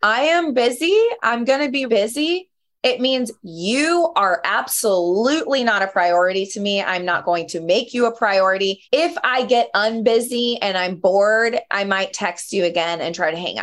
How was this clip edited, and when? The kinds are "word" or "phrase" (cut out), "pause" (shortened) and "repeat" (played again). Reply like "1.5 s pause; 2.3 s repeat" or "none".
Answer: 1.9 s word; 8.8 s pause